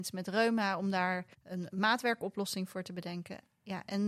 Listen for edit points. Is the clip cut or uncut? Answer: cut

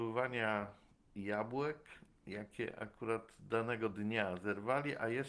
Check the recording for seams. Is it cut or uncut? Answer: uncut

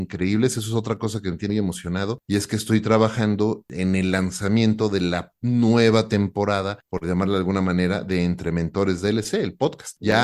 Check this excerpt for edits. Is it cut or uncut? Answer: cut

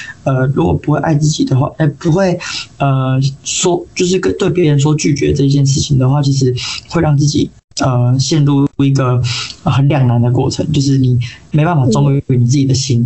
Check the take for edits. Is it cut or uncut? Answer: uncut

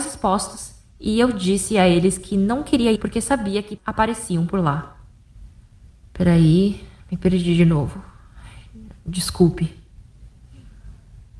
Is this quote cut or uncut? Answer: cut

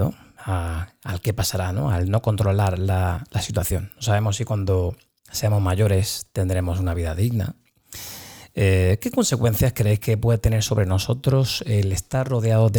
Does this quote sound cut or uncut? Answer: uncut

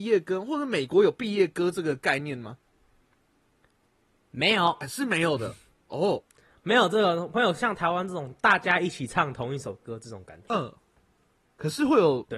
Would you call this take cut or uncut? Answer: uncut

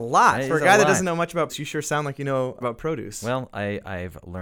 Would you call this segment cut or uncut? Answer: cut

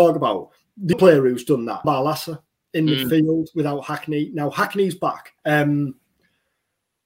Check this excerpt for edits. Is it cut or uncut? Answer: cut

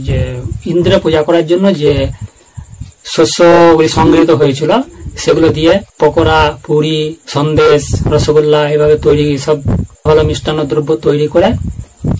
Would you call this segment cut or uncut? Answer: cut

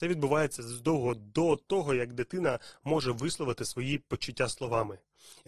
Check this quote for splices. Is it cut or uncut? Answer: uncut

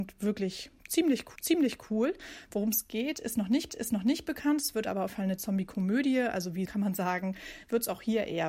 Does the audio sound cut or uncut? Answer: cut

